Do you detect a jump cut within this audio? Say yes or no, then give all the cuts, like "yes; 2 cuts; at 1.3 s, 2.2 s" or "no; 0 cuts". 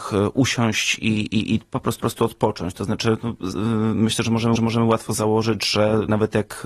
yes; 3 cuts; at 2.0 s, 3.5 s, 4.6 s